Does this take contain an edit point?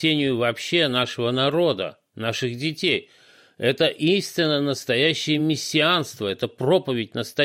no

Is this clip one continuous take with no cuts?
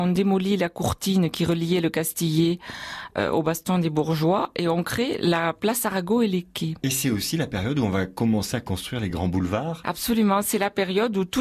yes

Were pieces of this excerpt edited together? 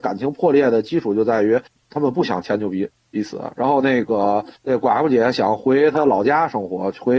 yes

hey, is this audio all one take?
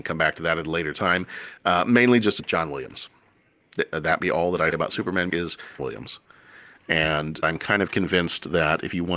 no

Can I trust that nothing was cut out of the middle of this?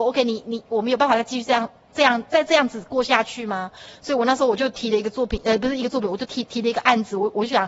yes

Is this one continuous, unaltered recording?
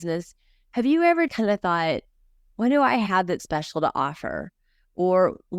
no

